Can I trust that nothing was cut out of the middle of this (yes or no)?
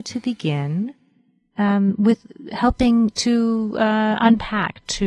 yes